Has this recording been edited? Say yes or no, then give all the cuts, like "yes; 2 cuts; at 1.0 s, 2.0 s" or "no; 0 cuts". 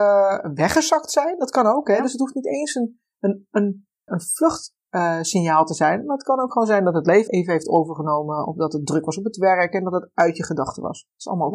yes; 2 cuts; at 4.1 s, 7.3 s